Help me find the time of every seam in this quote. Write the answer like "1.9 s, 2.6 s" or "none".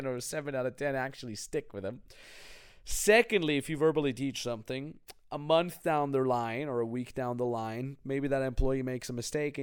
none